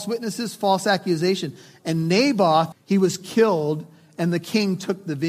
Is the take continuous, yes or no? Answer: no